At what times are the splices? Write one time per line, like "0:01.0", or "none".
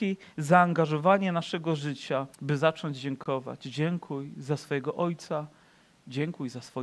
0:02.3